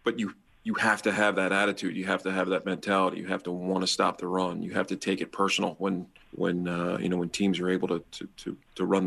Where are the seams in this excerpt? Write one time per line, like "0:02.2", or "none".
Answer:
none